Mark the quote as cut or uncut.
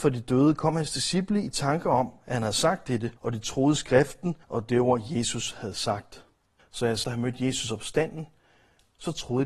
cut